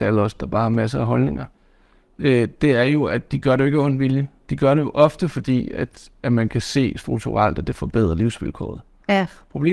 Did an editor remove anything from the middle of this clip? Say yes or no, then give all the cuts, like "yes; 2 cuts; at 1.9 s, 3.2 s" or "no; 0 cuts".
no; 0 cuts